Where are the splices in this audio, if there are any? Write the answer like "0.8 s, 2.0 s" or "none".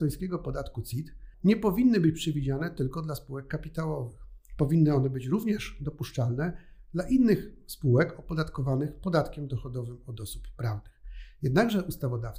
1.3 s